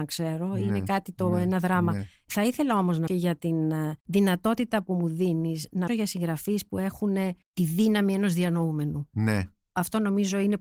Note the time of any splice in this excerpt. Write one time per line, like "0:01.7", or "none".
0:03.1
0:04.0
0:05.9
0:07.4